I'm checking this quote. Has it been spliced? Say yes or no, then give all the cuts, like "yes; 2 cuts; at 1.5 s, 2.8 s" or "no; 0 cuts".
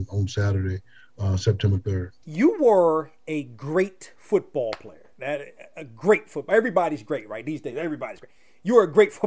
yes; 1 cut; at 2.2 s